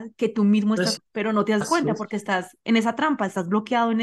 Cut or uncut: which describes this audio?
cut